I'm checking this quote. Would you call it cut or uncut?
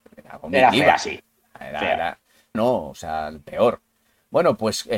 cut